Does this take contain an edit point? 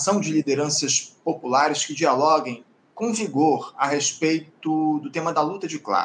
no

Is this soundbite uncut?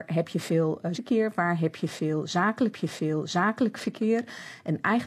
no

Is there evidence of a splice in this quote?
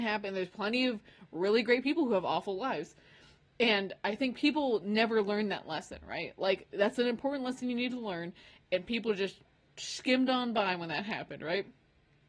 no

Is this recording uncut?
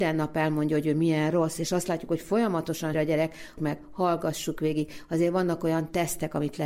no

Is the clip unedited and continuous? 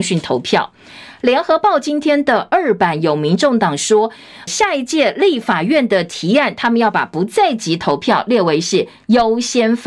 no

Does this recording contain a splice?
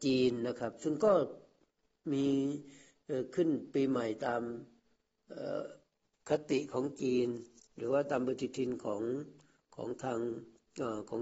yes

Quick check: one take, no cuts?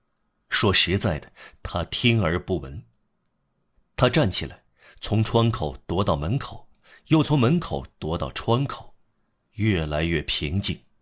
yes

